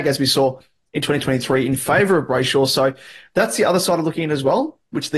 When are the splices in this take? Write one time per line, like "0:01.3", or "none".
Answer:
none